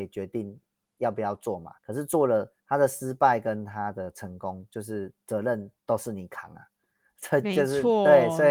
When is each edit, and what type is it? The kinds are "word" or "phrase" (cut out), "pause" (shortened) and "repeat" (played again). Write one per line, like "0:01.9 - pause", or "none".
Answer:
0:01.8 - pause
0:02.6 - pause